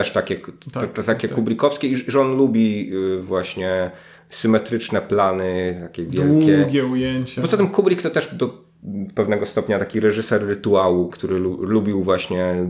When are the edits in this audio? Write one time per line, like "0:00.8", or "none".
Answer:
0:11.1